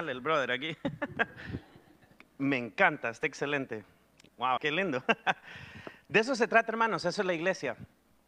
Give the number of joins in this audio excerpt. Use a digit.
1